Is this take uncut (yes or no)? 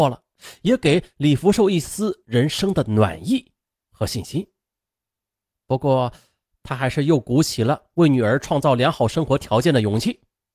yes